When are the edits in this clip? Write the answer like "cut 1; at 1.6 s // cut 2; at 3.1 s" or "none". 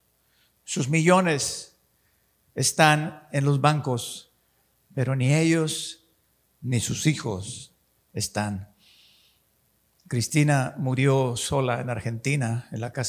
none